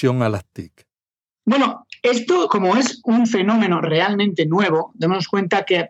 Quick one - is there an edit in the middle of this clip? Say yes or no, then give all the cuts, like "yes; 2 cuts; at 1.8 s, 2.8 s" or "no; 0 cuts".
no; 0 cuts